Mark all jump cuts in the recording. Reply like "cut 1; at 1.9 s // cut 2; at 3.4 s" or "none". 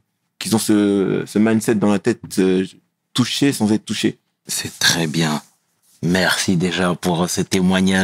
none